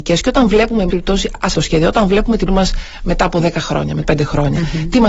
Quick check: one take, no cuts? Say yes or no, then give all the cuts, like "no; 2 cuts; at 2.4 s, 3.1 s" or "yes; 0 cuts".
no; 4 cuts; at 0.9 s, 1.5 s, 2.5 s, 4.0 s